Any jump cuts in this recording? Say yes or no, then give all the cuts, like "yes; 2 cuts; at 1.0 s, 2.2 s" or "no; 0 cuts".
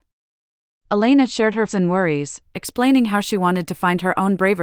yes; 1 cut; at 1.7 s